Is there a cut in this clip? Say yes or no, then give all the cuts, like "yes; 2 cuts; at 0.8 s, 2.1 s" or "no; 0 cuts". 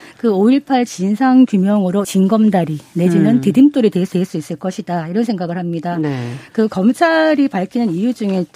yes; 2 cuts; at 2.0 s, 4.1 s